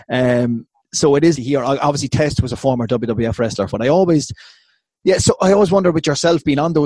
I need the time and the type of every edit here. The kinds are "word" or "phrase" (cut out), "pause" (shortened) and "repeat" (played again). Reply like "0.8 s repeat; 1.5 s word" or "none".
1.3 s word; 3.7 s phrase